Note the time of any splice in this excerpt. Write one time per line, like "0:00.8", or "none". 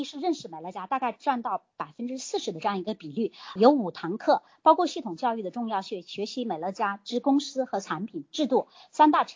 0:03.6